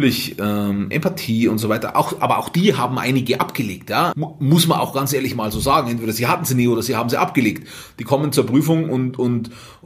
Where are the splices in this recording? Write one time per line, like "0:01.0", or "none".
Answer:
0:04.1